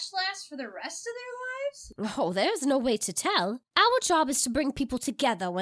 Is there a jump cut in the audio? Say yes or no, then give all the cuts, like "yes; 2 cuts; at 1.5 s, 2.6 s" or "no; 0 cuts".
yes; 1 cut; at 3.7 s